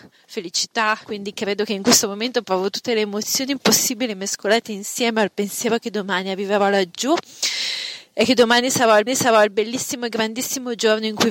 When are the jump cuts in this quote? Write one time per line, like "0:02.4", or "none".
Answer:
0:09.1